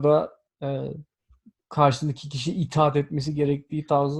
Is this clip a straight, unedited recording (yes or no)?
yes